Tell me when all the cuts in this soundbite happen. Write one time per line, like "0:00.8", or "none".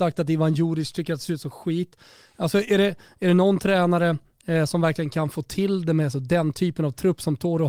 none